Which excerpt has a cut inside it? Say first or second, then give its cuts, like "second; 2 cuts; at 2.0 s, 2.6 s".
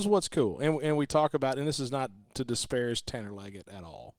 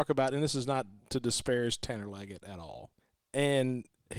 second; 1 cut; at 3.0 s